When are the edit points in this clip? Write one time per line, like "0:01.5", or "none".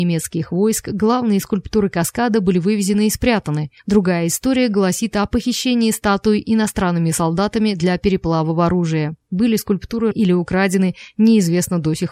0:03.8
0:09.2
0:10.1